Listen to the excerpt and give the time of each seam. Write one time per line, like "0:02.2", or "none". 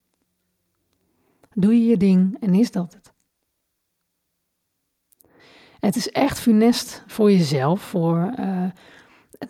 none